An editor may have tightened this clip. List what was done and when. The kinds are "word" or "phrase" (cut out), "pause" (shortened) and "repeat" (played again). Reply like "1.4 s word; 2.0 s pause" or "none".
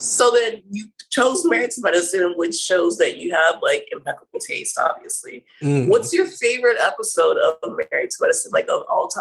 none